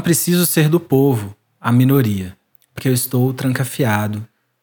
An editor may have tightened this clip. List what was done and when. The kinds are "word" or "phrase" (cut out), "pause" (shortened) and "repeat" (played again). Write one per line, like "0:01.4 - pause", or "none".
0:02.8 - word